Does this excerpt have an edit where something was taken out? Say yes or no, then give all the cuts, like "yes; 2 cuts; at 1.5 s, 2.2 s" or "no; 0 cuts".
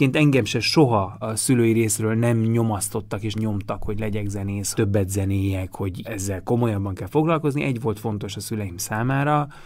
yes; 4 cuts; at 1.2 s, 3.3 s, 4.7 s, 6.0 s